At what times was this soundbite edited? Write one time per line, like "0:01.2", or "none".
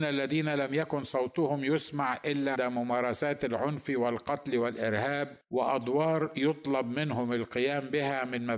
0:02.5
0:05.4